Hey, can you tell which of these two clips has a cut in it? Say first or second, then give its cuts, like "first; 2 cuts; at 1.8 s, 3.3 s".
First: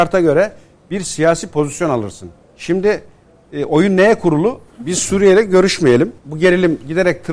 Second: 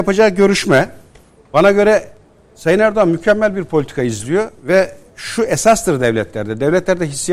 first; 3 cuts; at 2.4 s, 4.7 s, 6.2 s